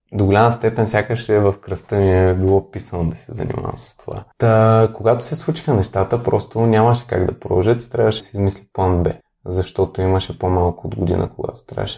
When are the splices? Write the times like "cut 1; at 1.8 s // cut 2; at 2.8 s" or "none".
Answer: cut 1; at 4.3 s // cut 2; at 8.2 s // cut 3; at 9.2 s